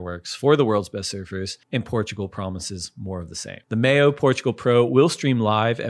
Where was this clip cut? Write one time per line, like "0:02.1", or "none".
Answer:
0:01.6
0:03.6